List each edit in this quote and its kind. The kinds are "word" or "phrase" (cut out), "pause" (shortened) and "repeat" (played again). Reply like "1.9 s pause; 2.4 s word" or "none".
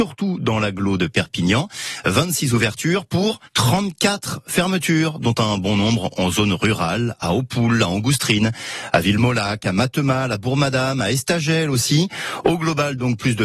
3.5 s pause